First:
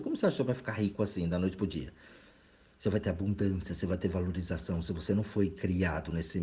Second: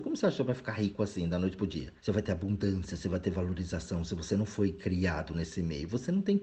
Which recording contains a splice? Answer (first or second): second